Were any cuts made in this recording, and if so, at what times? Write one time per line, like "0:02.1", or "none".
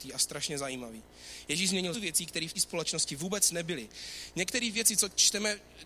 0:01.9
0:02.5

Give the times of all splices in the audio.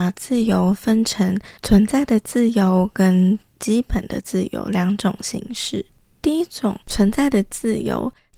0:01.6
0:06.8

